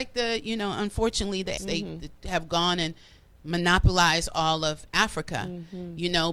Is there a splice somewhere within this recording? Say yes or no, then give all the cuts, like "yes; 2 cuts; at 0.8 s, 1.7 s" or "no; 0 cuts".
yes; 1 cut; at 1.6 s